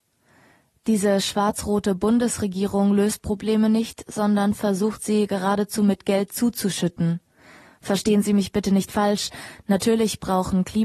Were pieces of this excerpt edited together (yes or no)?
no